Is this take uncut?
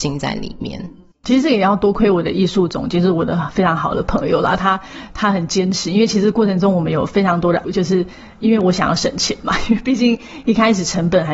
no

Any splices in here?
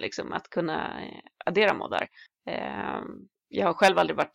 no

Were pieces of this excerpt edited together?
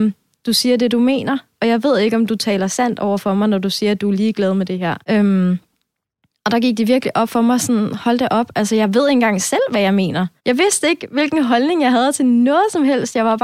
yes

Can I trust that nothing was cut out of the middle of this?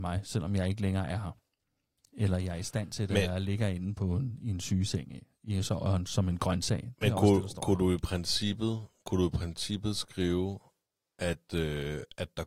yes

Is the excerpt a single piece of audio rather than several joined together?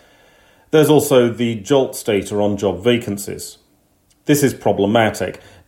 yes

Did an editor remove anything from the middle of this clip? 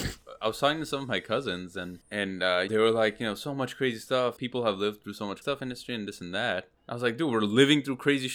yes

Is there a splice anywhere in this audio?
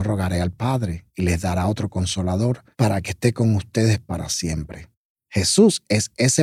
yes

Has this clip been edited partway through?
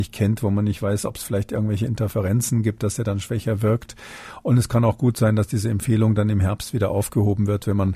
no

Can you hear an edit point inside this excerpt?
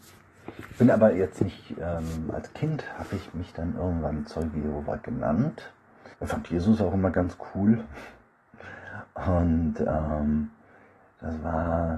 yes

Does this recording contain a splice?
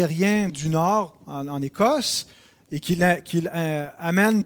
no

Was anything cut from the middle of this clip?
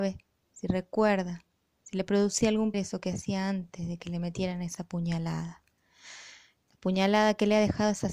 yes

